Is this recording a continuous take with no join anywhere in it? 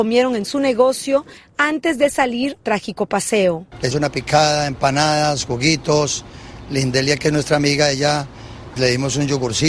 no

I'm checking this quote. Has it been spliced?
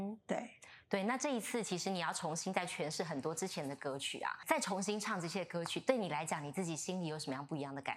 yes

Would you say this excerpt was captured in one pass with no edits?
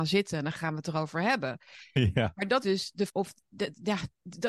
no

